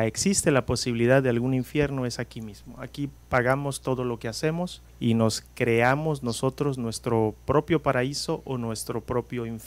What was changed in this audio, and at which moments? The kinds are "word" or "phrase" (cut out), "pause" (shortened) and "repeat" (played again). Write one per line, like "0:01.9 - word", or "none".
0:04.9 - pause

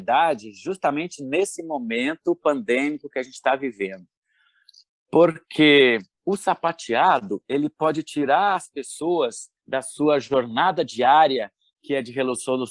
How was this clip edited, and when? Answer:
0:06.1 - pause
0:09.6 - pause

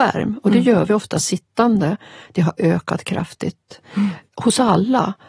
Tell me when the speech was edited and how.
none

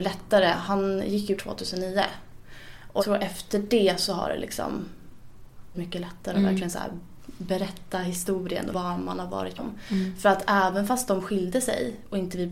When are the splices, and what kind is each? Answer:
0:01.4 - word
0:03.0 - word
0:05.7 - word
0:08.7 - word
0:09.6 - word

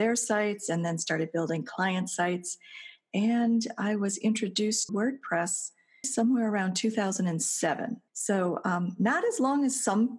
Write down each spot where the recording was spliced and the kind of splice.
0:04.9 - word
0:06.0 - word
0:08.1 - pause

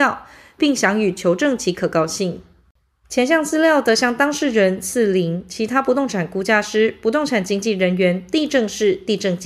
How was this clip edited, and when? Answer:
none

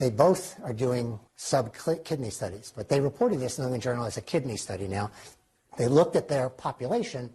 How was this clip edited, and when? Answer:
0:01.3 - pause

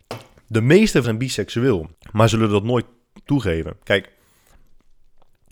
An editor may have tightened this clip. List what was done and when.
0:01.0 - word
0:01.9 - pause
0:03.3 - word

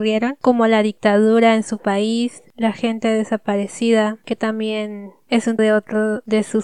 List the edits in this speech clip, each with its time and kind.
0:05.6 - word

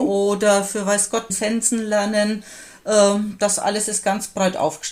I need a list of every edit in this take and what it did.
0:01.3 - phrase

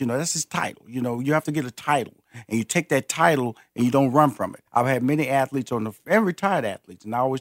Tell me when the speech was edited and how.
0:04.7 - pause
0:06.1 - word

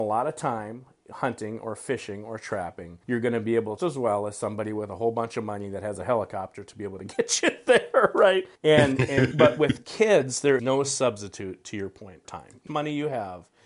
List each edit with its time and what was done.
0:03.0 - pause
0:03.8 - phrase
0:08.6 - pause
0:09.3 - word
0:10.6 - word
0:12.2 - word
0:12.7 - phrase

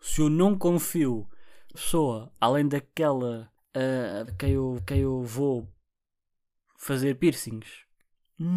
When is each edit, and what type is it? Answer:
0:01.7 - word
0:03.6 - pause
0:04.3 - word
0:04.8 - repeat

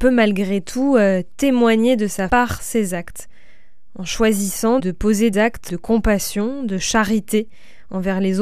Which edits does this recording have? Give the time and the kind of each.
0:02.3 - word
0:04.8 - word
0:05.3 - word
0:05.7 - word

